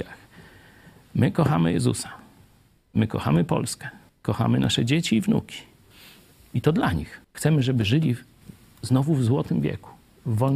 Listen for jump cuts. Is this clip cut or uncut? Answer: cut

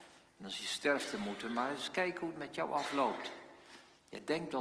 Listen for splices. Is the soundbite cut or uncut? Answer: uncut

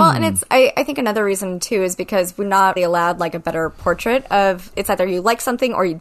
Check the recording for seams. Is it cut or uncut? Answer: cut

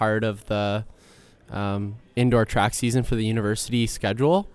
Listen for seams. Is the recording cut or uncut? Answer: uncut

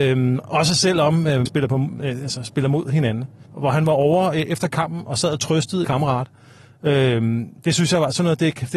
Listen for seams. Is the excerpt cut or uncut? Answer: cut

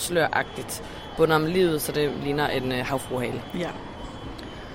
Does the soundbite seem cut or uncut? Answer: uncut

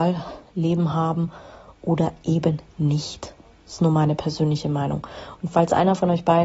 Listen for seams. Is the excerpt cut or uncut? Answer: uncut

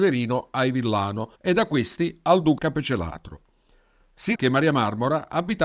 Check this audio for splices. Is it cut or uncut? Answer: cut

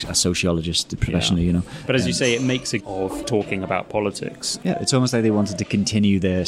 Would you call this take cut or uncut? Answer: cut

